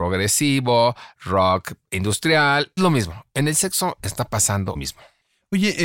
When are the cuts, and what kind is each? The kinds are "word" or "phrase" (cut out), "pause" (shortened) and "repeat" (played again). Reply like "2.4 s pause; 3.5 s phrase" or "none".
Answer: 2.8 s word; 4.7 s word

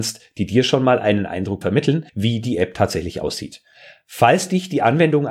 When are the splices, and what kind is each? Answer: 1.6 s word; 2.1 s pause

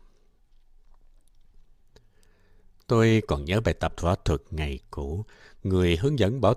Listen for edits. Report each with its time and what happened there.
none

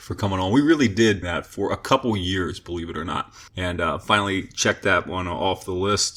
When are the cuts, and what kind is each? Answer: 1.2 s phrase; 3.5 s pause

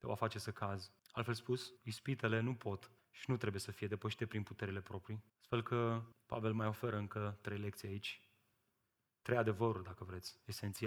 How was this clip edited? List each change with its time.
1.0 s pause; 1.8 s pause; 3.0 s pause; 5.3 s pause; 6.1 s pause

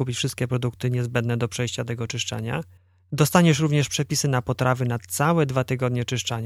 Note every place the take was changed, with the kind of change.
2.8 s pause

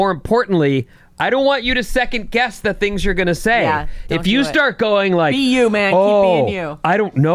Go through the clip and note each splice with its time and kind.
none

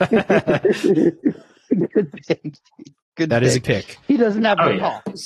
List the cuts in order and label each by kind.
3.6 s word; 4.0 s pause

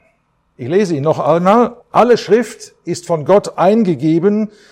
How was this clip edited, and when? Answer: 1.8 s pause

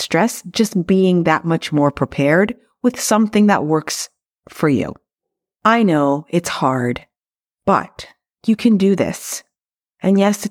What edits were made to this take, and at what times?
none

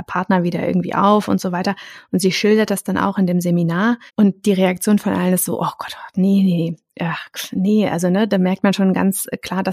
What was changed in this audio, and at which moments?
4.1 s pause

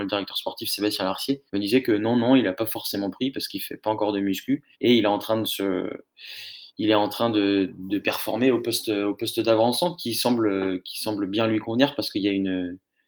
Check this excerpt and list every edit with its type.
1.5 s pause; 4.7 s pause; 6.7 s pause

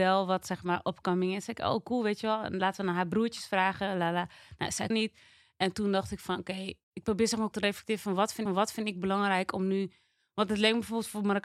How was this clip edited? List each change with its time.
4.9 s word; 6.8 s pause; 7.5 s word; 8.5 s repeat

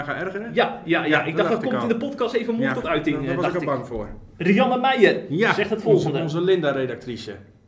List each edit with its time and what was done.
none

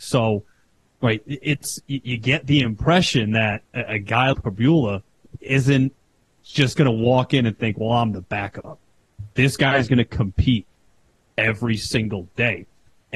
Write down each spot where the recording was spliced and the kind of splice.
4.3 s word

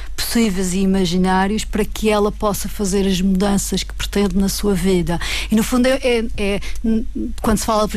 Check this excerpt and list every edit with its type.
none

